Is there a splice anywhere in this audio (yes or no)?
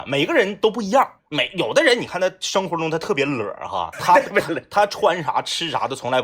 yes